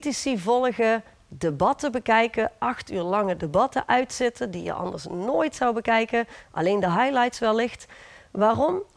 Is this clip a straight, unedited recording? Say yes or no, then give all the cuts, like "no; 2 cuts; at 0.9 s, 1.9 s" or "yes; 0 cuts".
yes; 0 cuts